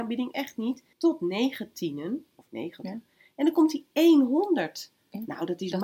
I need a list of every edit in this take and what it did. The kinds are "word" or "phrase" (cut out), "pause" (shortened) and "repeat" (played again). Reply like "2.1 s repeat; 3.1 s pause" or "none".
0.9 s pause